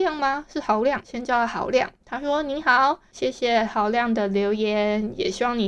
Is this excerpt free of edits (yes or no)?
no